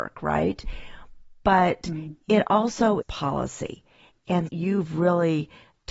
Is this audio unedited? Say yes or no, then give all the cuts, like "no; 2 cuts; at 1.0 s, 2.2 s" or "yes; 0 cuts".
no; 2 cuts; at 3.0 s, 4.5 s